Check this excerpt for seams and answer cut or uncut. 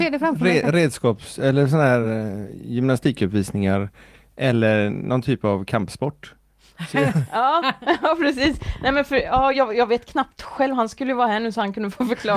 uncut